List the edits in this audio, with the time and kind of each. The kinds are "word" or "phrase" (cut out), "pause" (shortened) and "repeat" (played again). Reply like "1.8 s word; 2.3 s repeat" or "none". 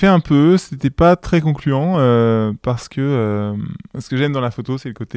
none